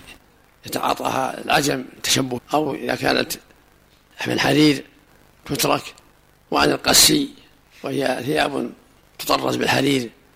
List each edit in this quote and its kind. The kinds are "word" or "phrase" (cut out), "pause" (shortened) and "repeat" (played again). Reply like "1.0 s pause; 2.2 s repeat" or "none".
2.4 s word